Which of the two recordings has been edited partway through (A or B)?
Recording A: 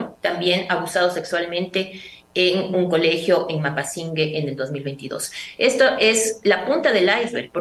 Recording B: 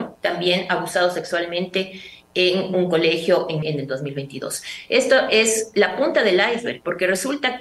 B